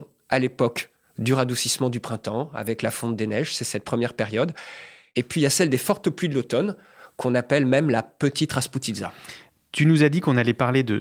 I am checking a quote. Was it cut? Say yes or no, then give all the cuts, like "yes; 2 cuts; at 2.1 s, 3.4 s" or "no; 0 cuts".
no; 0 cuts